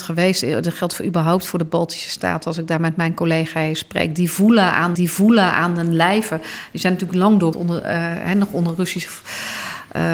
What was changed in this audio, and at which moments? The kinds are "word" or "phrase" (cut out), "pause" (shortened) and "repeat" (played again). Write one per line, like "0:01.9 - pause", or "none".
0:04.9 - repeat
0:07.5 - word